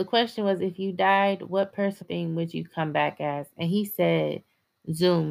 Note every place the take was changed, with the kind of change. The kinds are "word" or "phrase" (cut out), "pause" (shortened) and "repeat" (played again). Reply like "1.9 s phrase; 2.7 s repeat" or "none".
2.0 s word